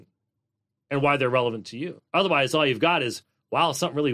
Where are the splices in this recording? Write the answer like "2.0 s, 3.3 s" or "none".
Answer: 2.1 s